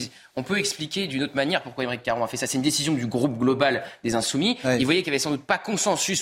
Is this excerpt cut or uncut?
uncut